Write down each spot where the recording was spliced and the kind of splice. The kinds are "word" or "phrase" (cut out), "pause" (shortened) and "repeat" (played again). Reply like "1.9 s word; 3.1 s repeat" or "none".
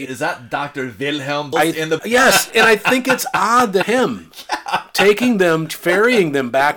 1.5 s word; 2.0 s word; 2.5 s word; 3.8 s word